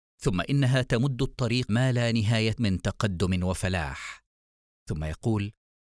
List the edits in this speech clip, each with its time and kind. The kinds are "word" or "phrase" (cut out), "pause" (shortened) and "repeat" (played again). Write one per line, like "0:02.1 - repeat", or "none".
0:01.7 - word
0:02.6 - word